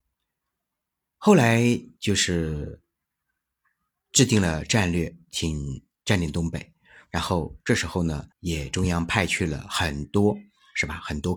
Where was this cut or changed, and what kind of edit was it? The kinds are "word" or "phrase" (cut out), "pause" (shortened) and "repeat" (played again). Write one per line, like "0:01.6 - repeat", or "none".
0:08.3 - word